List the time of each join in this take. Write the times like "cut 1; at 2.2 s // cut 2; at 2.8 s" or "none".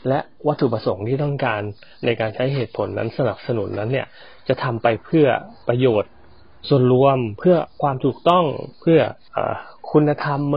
none